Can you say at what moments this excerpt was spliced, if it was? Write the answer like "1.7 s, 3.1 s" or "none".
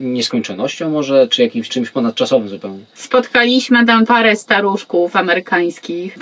1.7 s, 4.1 s